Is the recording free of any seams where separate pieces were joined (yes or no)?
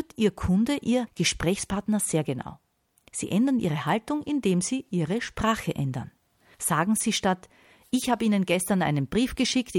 yes